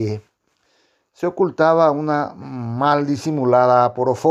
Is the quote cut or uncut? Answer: uncut